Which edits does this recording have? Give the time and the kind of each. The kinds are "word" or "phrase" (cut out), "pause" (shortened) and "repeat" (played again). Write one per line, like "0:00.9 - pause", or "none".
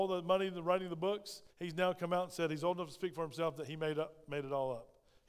0:01.5 - pause